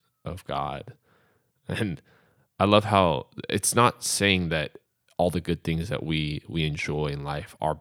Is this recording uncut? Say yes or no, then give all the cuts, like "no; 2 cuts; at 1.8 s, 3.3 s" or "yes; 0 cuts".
yes; 0 cuts